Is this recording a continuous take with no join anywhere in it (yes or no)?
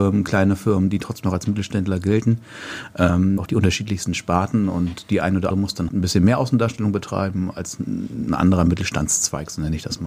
no